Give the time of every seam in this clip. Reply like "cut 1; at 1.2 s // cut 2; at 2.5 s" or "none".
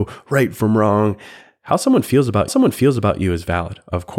cut 1; at 2.5 s